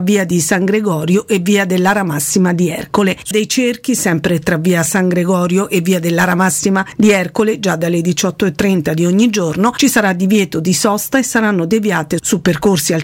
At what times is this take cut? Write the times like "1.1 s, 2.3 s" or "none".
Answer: 3.3 s